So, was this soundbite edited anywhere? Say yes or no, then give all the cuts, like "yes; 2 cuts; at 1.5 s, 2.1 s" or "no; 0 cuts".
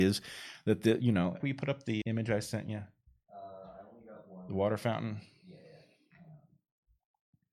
yes; 2 cuts; at 1.4 s, 2.0 s